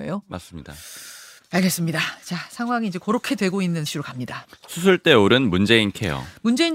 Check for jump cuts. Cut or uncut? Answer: cut